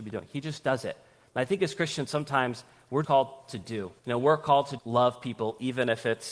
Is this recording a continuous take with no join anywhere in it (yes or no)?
no